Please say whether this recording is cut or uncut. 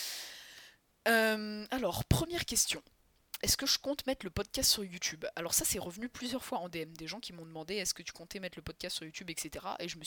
uncut